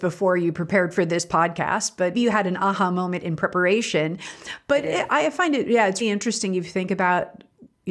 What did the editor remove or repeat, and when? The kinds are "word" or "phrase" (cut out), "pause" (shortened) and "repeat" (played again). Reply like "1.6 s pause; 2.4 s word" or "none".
2.1 s word; 6.0 s word

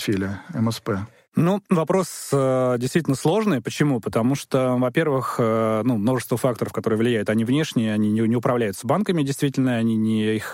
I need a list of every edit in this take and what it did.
none

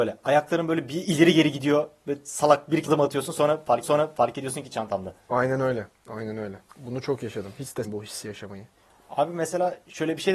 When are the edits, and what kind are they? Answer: 2.9 s word; 3.8 s repeat; 6.7 s pause; 7.8 s word; 8.7 s pause

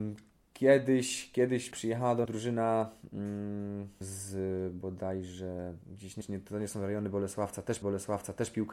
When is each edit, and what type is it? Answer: 1.7 s word; 2.2 s word; 4.0 s word; 5.8 s pause; 6.2 s word; 7.8 s repeat

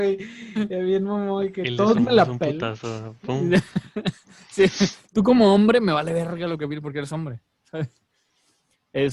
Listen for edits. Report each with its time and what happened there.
none

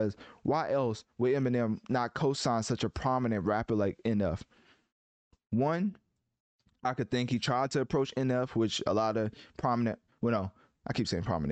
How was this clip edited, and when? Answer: none

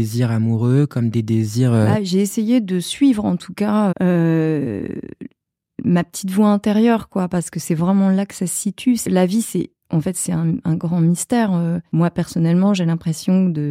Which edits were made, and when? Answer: 3.9 s word

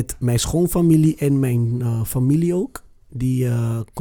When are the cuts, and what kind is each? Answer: none

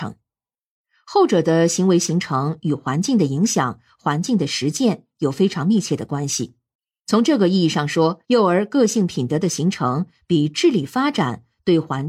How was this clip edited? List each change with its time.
6.7 s pause; 8.2 s pause

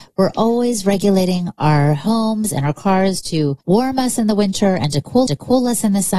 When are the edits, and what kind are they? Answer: 3.6 s pause; 5.3 s repeat

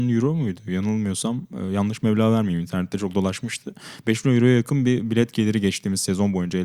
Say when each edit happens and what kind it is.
none

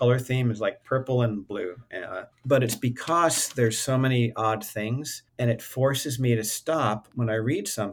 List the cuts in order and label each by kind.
2.3 s pause; 5.3 s pause

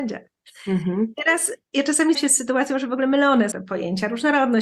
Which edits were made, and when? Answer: 2.1 s word; 3.5 s word

